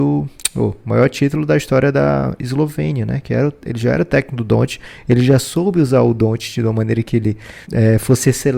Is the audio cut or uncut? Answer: cut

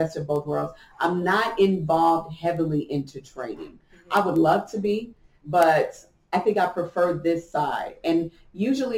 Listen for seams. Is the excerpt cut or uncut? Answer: uncut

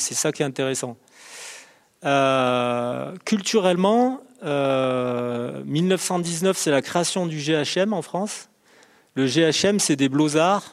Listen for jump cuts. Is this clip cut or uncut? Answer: uncut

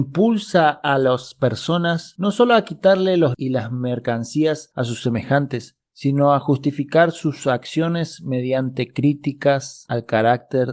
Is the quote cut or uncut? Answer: cut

